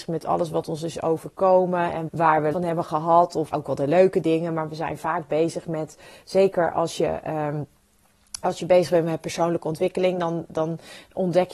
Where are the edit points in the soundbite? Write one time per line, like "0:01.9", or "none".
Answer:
0:02.1
0:02.5
0:03.5